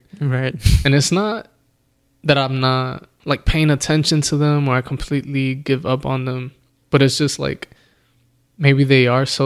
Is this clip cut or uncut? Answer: uncut